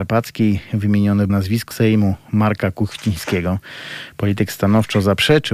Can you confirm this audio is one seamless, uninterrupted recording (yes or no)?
no